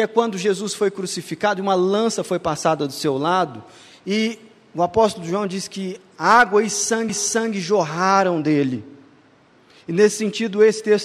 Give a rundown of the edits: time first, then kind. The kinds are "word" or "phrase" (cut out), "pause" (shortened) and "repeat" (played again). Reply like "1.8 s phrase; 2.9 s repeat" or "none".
7.1 s repeat